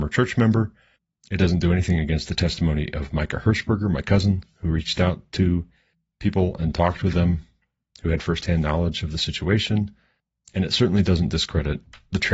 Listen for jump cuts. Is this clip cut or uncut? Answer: uncut